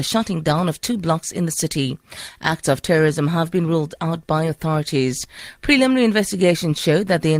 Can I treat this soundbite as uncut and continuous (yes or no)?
yes